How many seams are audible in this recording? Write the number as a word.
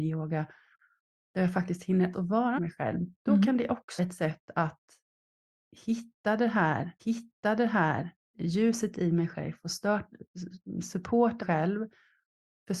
six